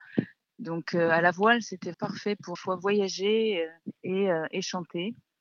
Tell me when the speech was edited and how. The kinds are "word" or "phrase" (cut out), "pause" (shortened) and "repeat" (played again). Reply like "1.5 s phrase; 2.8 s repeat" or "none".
1.9 s word; 2.6 s phrase; 4.0 s pause